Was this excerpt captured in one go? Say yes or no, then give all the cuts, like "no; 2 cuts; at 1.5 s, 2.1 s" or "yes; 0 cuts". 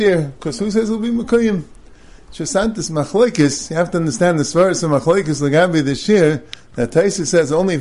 yes; 0 cuts